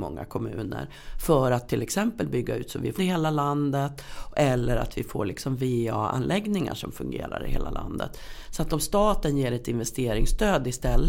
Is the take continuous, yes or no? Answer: no